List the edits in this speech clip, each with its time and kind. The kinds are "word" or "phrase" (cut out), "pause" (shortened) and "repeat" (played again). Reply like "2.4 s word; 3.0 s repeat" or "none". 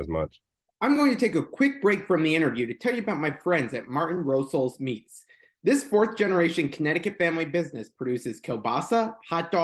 none